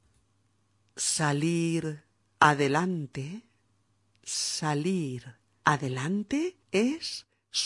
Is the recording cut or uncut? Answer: cut